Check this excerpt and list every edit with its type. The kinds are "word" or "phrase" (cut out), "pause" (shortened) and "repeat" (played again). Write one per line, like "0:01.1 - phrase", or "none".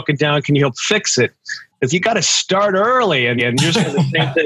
0:01.9 - word
0:03.4 - repeat